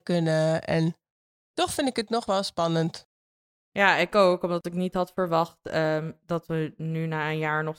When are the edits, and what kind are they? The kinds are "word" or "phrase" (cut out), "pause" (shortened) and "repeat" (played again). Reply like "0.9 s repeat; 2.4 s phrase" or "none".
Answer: none